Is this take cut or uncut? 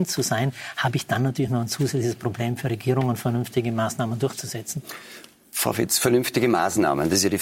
uncut